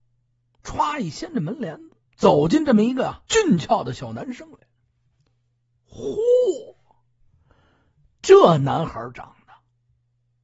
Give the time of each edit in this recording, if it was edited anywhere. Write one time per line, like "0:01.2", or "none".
0:02.1
0:03.3